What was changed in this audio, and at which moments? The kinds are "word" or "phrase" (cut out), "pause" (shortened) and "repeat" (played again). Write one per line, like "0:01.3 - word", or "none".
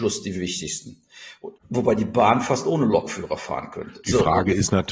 0:01.6 - pause